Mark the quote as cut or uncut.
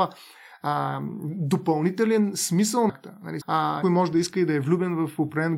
cut